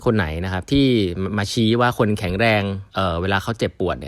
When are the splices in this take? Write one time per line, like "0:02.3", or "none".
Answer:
0:02.9